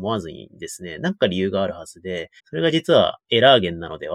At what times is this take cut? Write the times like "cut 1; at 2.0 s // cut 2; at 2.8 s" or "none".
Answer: cut 1; at 2.4 s